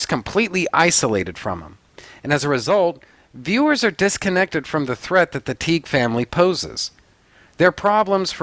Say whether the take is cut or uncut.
uncut